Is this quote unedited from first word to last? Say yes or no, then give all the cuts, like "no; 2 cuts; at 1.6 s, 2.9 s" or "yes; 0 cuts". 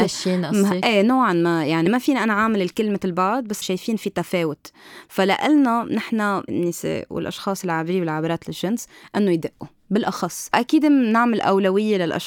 no; 2 cuts; at 3.6 s, 6.5 s